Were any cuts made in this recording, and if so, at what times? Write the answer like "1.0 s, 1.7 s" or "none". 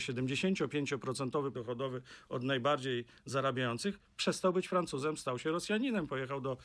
1.5 s